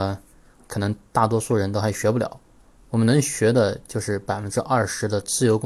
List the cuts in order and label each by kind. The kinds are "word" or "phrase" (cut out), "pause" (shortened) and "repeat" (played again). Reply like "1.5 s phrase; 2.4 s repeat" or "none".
none